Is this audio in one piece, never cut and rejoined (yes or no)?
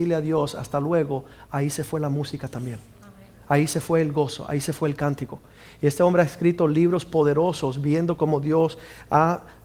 yes